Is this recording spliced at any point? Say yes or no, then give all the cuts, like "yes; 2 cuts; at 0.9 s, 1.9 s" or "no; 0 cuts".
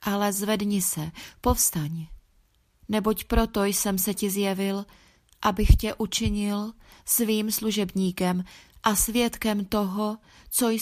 no; 0 cuts